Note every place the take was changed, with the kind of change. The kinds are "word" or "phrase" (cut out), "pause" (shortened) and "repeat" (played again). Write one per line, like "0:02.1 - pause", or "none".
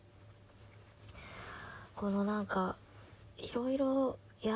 0:03.3 - pause